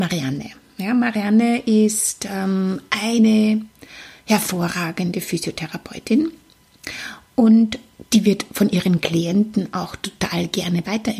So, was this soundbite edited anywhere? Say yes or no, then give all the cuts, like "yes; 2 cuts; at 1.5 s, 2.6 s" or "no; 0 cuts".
no; 0 cuts